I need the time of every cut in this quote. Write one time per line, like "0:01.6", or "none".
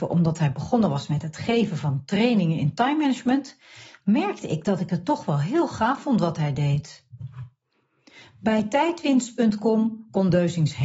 none